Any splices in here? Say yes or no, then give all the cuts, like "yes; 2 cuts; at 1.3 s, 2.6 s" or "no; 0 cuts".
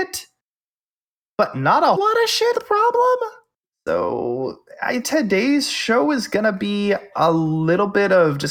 yes; 4 cuts; at 2.0 s, 2.5 s, 3.6 s, 5.0 s